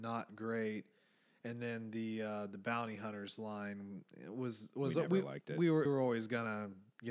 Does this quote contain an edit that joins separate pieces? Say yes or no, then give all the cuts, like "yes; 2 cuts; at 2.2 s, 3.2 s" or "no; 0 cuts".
yes; 1 cut; at 5.8 s